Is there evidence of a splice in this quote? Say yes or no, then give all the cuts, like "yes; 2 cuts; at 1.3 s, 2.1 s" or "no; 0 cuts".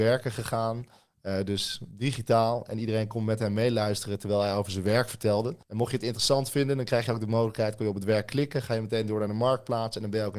yes; 1 cut; at 5.6 s